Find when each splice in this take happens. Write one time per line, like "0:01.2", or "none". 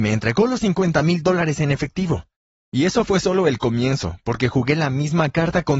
0:02.5